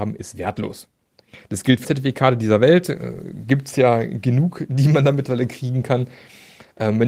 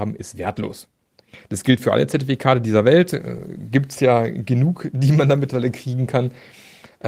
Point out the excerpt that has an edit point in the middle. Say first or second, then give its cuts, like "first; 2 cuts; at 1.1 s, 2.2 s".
first; 1 cut; at 1.8 s